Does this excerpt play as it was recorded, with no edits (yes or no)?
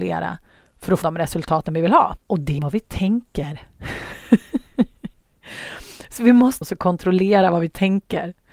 no